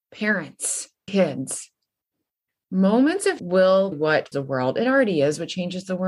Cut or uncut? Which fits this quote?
cut